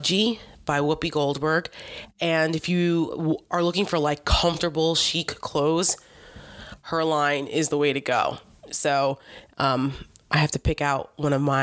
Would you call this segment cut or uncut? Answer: uncut